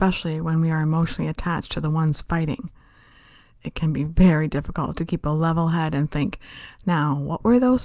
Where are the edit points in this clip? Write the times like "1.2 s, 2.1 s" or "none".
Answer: none